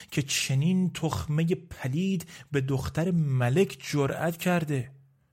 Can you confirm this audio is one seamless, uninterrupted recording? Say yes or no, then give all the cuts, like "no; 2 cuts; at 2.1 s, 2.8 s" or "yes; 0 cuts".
yes; 0 cuts